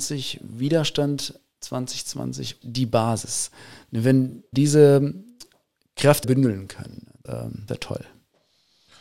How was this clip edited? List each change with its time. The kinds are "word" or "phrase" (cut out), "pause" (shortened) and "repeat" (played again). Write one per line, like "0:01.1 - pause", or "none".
0:02.6 - word
0:04.5 - word
0:06.2 - word
0:07.3 - word
0:07.7 - word